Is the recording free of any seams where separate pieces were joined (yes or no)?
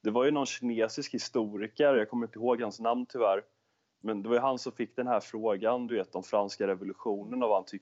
yes